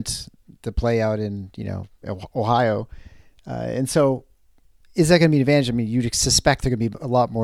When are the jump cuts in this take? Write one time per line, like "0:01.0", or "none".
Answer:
none